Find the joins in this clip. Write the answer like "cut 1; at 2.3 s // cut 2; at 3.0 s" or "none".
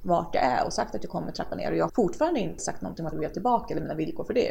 cut 1; at 1.9 s // cut 2; at 2.6 s // cut 3; at 3.1 s